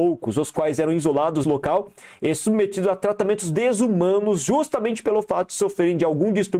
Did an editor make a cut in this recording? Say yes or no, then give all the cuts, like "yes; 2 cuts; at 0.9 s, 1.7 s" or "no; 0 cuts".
yes; 1 cut; at 1.4 s